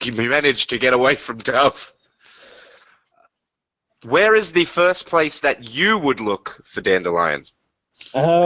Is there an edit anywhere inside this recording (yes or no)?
no